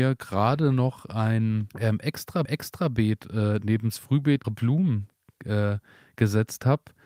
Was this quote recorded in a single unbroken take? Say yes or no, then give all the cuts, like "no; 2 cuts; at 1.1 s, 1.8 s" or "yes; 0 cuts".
no; 3 cuts; at 1.7 s, 2.4 s, 4.4 s